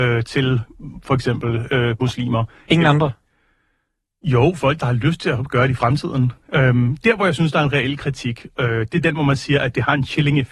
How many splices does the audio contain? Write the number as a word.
zero